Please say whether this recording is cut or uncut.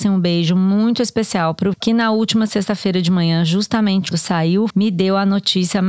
cut